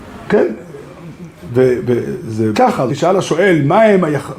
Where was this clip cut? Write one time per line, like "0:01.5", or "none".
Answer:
0:02.5
0:02.9